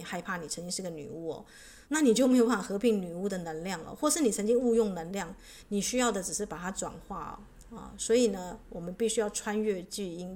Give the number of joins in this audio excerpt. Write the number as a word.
one